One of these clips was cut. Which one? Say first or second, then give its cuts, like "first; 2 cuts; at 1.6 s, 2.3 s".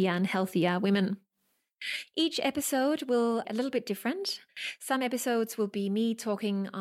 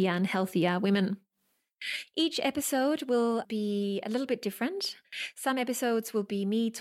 first; 1 cut; at 3.4 s